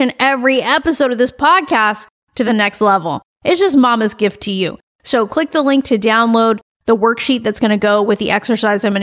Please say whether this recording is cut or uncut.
uncut